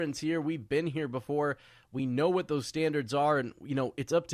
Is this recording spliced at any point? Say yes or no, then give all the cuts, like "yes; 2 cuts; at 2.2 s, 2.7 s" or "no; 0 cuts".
no; 0 cuts